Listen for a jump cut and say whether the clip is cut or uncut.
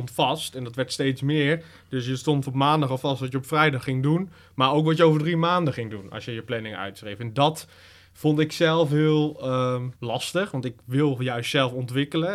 cut